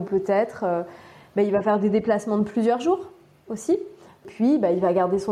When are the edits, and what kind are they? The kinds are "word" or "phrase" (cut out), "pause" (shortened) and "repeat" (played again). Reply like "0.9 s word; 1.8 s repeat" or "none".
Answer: none